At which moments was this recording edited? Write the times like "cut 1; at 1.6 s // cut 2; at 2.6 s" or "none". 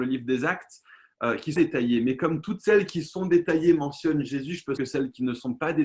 cut 1; at 1.6 s // cut 2; at 4.8 s